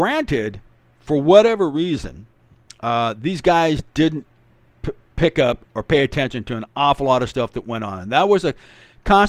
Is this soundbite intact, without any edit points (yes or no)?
yes